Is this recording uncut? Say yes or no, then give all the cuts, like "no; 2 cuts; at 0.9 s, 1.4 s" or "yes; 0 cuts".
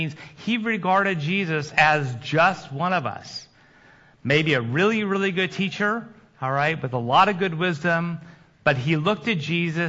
yes; 0 cuts